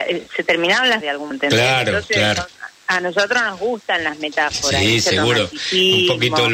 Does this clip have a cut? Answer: yes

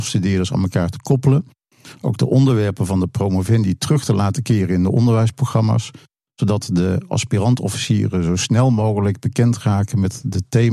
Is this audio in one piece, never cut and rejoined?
yes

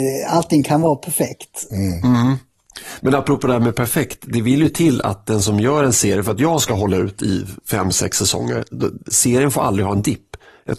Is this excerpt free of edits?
yes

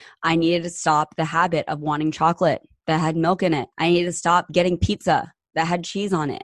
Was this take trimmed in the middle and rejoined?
yes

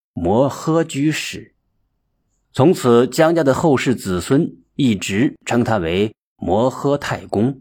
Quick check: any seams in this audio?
no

